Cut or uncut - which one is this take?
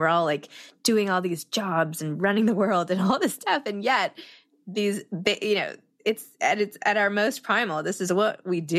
uncut